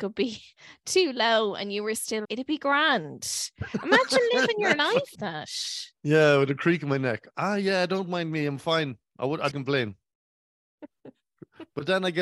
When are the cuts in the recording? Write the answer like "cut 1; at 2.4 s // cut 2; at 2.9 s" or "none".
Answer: cut 1; at 2.2 s // cut 2; at 5.1 s // cut 3; at 9.5 s